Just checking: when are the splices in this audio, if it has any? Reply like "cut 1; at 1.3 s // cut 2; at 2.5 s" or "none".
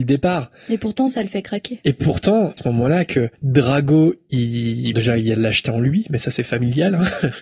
cut 1; at 2.6 s // cut 2; at 3.3 s // cut 3; at 4.9 s // cut 4; at 5.4 s